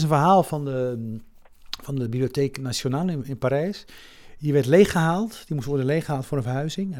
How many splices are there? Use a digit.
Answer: 0